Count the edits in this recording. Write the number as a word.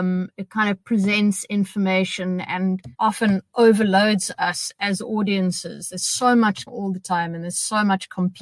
two